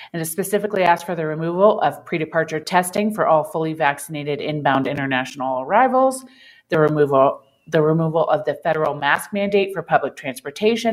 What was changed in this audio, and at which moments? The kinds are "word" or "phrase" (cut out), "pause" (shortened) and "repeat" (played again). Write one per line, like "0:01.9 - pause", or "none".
none

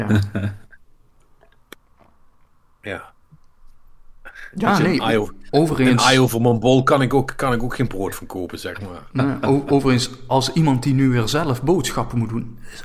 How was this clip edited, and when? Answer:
none

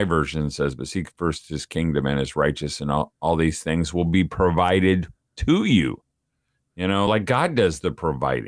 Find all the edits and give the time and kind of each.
none

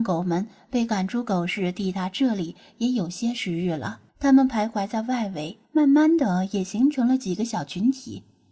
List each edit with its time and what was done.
0:04.1 - pause
0:05.6 - pause

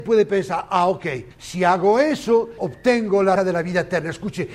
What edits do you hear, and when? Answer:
0:01.3 - pause
0:02.6 - word
0:03.4 - word

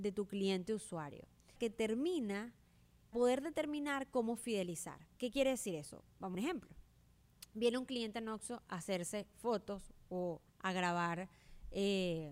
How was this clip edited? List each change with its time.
0:01.6 - word
0:03.1 - word
0:05.2 - pause
0:06.3 - phrase
0:10.5 - pause

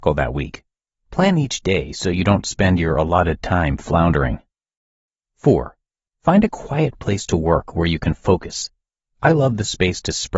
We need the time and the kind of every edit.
none

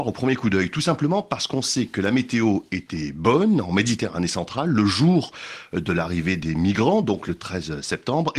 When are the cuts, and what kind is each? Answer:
none

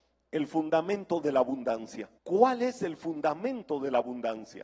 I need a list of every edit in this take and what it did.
0:02.2 - pause

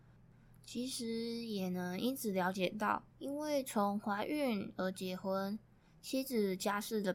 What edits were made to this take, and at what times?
0:03.1 - pause

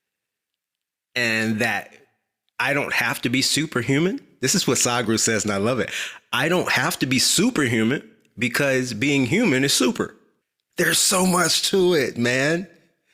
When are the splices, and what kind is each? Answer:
0:10.4 - pause

